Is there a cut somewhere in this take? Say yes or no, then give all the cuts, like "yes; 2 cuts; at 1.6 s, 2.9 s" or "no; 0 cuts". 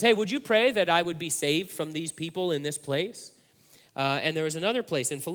no; 0 cuts